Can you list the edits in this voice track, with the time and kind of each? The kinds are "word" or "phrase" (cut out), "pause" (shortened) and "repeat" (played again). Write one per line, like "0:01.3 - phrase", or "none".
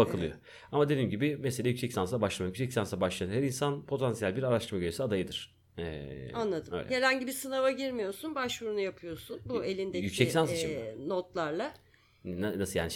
0:05.7 - pause